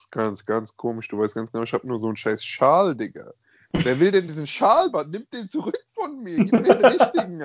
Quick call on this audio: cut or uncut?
uncut